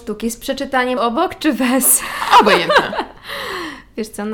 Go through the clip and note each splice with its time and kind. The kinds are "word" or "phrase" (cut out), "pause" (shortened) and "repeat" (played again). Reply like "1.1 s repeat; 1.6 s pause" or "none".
1.0 s word